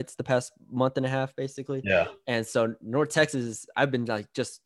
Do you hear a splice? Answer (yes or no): no